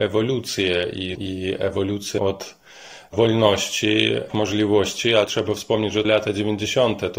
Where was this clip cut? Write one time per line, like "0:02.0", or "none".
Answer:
0:01.1
0:02.2
0:04.3
0:05.3
0:06.0